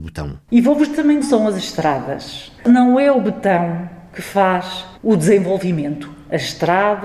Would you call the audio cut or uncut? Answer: cut